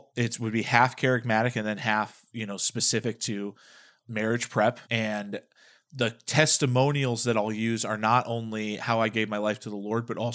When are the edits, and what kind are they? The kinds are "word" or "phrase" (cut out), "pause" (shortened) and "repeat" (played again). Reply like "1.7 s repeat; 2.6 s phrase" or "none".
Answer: 4.0 s word; 4.8 s pause